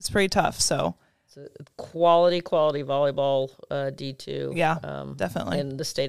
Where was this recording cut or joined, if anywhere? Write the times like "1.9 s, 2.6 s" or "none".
none